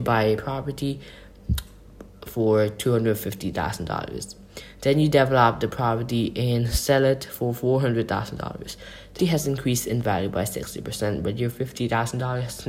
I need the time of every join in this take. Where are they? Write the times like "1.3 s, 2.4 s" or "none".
9.2 s